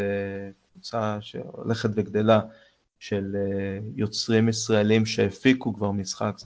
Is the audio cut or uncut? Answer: uncut